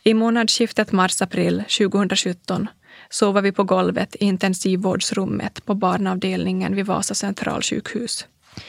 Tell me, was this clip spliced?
no; 0 cuts

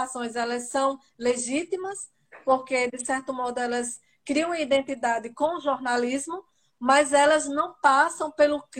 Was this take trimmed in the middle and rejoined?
no; 0 cuts

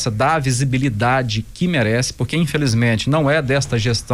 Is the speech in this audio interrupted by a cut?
no; 0 cuts

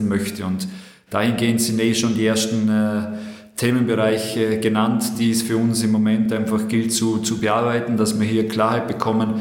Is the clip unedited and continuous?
yes; 0 cuts

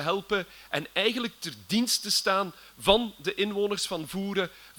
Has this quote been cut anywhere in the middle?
no; 0 cuts

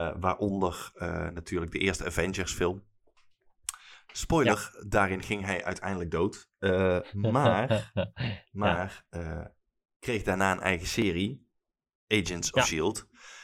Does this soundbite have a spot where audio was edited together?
no; 0 cuts

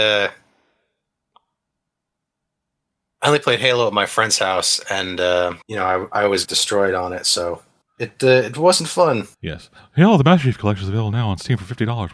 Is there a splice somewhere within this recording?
yes; 4 cuts; at 5.6 s, 6.4 s, 7.8 s, 9.3 s

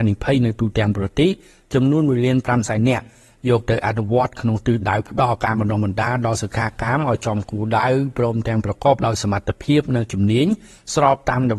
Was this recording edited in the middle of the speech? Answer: no; 0 cuts

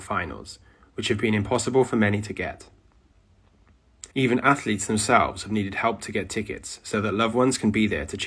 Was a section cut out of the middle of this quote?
yes; 1 cut; at 4.1 s

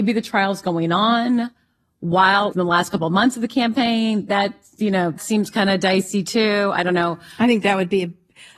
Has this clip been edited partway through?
yes; 2 cuts; at 2.5 s, 5.2 s

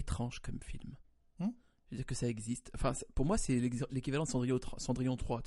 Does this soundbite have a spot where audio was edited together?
no; 0 cuts

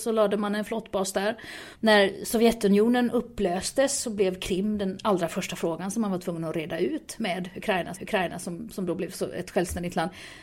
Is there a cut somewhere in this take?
yes; 1 cut; at 8.0 s

